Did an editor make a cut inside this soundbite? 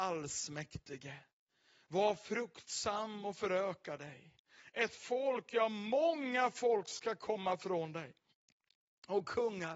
no; 0 cuts

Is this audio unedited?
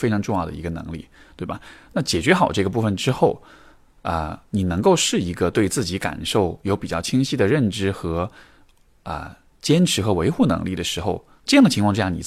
yes; 0 cuts

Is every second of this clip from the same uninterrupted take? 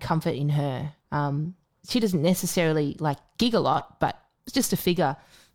no; 1 cut; at 1.0 s

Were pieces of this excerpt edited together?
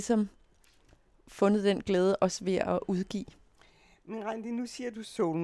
no; 0 cuts

